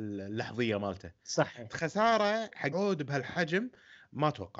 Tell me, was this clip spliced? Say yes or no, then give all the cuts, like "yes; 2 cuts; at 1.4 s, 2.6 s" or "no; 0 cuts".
yes; 2 cuts; at 1.7 s, 2.7 s